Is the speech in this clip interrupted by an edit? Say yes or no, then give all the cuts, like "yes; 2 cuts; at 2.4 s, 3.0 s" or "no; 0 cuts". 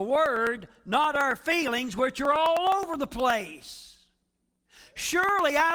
no; 0 cuts